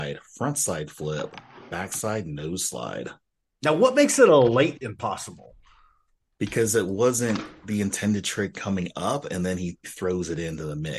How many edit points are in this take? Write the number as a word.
one